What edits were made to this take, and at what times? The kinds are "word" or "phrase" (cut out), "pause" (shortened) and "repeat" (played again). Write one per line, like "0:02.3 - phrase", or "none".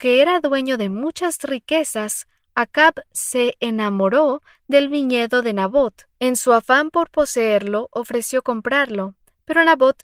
0:06.1 - pause

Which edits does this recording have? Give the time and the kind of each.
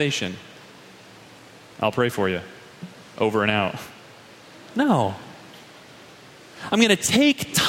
none

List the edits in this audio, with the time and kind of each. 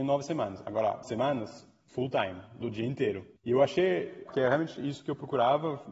0:01.0 - word
0:02.6 - word
0:03.4 - pause
0:04.3 - phrase

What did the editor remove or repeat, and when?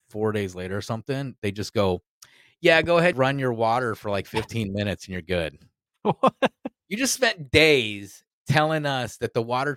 0:03.1 - word

